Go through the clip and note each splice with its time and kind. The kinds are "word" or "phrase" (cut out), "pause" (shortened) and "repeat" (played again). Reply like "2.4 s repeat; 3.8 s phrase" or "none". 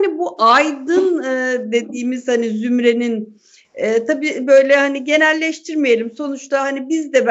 none